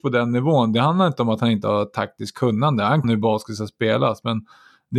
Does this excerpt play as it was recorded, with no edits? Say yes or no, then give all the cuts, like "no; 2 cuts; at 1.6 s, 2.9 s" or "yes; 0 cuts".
no; 1 cut; at 3.0 s